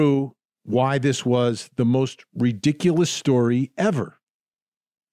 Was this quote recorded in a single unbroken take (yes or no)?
yes